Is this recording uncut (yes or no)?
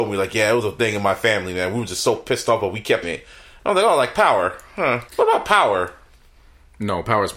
no